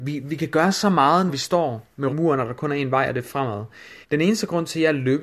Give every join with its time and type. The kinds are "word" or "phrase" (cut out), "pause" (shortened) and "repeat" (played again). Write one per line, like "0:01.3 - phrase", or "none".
0:01.3 - word
0:02.1 - phrase
0:04.0 - pause